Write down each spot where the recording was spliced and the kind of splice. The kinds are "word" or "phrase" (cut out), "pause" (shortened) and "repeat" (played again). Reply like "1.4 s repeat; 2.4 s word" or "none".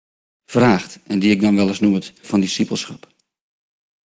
2.2 s word